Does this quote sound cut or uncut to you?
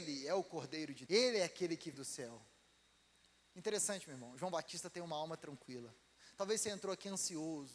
cut